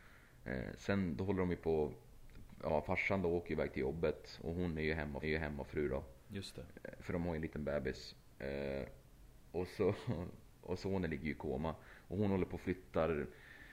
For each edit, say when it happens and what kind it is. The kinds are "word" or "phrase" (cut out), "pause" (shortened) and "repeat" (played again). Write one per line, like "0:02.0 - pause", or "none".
0:05.2 - repeat